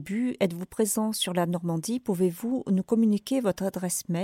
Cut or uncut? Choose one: uncut